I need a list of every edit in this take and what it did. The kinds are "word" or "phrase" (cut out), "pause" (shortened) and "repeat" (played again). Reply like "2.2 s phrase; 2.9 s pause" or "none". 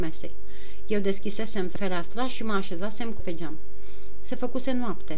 3.2 s word